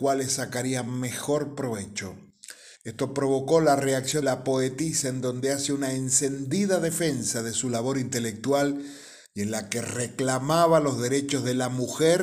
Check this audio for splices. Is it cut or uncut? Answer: cut